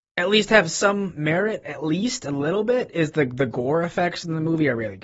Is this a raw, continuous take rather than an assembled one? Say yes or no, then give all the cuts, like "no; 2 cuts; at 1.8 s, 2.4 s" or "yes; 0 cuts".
yes; 0 cuts